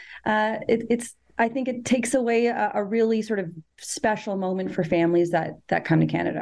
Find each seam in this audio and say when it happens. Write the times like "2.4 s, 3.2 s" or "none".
3.7 s